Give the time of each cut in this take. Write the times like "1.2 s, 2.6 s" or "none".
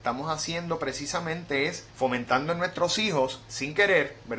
1.9 s